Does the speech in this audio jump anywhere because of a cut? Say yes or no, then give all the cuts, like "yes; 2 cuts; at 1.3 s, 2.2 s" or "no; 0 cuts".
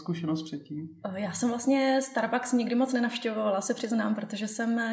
no; 0 cuts